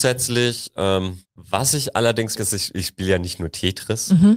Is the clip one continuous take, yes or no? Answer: no